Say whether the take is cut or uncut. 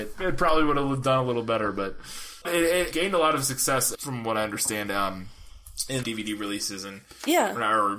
cut